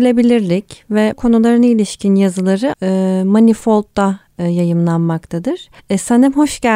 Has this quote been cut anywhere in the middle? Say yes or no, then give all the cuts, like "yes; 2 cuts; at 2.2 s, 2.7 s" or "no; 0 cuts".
yes; 3 cuts; at 1.1 s, 2.7 s, 5.8 s